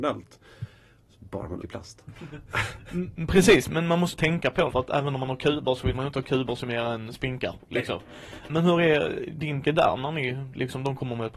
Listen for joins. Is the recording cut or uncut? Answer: cut